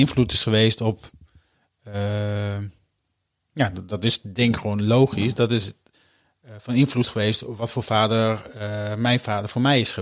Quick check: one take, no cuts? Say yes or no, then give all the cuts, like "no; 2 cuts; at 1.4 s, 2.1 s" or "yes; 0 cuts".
yes; 0 cuts